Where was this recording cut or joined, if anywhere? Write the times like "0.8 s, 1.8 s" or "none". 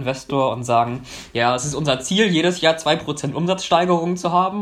none

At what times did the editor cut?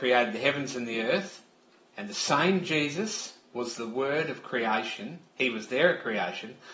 none

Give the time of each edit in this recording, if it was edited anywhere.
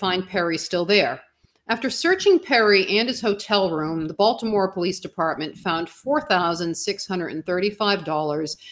none

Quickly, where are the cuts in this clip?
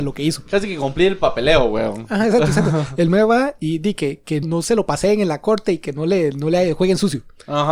4.4 s

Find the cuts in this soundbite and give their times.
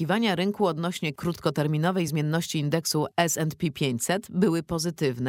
none

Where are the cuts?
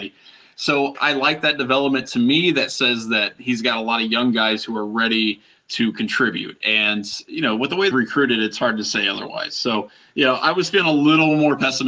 0.9 s, 7.9 s

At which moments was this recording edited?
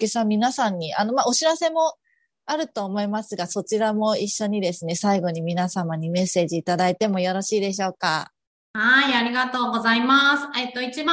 none

